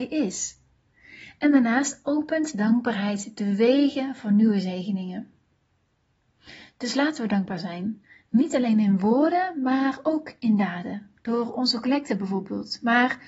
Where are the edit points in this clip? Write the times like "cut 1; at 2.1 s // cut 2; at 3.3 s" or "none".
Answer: cut 1; at 8.0 s // cut 2; at 11.2 s